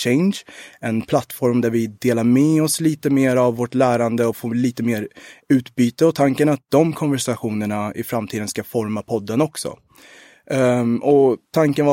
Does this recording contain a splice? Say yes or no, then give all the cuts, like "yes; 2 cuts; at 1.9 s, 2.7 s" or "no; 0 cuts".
no; 0 cuts